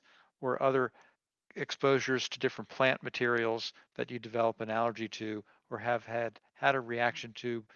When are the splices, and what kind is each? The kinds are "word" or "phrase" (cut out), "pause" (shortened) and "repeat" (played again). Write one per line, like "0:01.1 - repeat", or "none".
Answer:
none